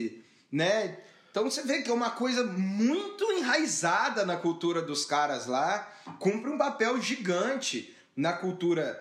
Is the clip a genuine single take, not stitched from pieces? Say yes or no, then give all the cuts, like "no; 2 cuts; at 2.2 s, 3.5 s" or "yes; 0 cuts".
yes; 0 cuts